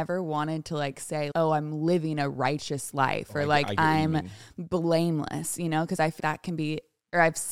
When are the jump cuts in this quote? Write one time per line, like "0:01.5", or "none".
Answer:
0:01.3
0:06.2